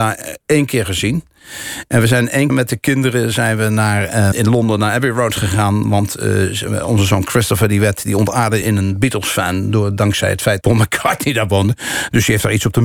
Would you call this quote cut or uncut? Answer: cut